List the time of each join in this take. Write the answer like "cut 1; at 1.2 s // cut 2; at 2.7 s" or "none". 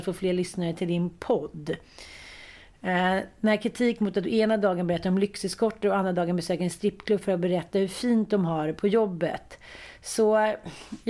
none